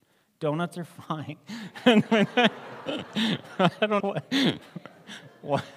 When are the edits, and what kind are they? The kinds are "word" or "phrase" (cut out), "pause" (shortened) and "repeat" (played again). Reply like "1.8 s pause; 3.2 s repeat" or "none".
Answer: 4.0 s word